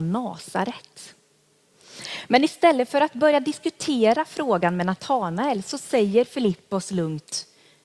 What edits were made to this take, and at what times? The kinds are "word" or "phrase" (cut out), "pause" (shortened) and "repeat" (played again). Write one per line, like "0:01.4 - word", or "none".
none